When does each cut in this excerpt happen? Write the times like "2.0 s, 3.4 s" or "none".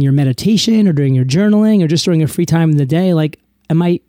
none